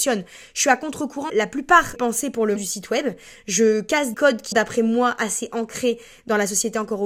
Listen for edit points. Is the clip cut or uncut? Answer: cut